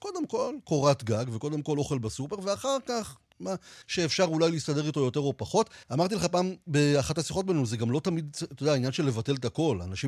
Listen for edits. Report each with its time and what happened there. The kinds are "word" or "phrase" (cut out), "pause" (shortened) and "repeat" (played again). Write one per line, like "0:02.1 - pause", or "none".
0:03.3 - word
0:03.8 - pause
0:05.8 - pause